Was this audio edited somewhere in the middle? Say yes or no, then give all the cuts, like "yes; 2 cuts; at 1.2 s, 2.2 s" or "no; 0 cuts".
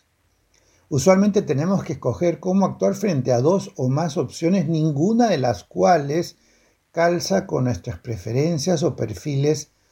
no; 0 cuts